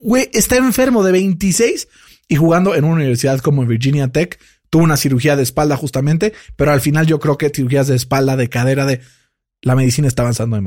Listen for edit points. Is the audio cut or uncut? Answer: uncut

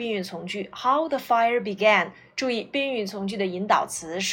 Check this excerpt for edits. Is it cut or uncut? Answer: uncut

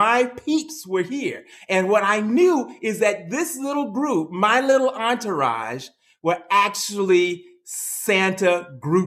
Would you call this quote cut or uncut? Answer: uncut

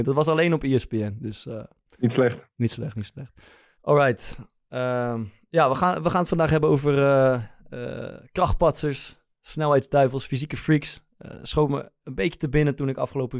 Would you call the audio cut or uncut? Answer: uncut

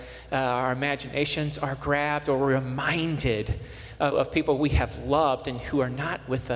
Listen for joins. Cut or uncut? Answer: cut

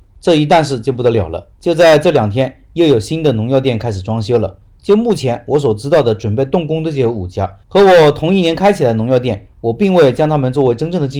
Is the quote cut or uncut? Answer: cut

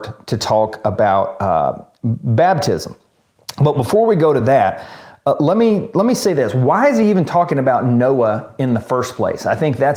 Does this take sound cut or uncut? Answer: uncut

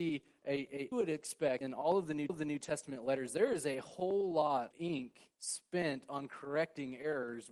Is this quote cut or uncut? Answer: cut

